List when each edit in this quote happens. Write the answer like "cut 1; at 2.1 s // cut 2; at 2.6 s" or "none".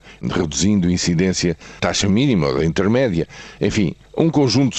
cut 1; at 1.8 s